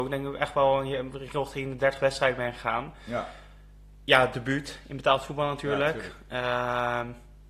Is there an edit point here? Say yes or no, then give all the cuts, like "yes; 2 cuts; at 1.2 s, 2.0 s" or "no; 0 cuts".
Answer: no; 0 cuts